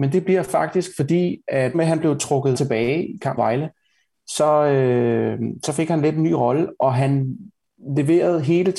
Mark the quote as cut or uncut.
cut